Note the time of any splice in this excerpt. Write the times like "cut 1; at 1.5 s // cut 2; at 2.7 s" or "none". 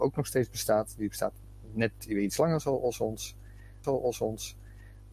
cut 1; at 3.8 s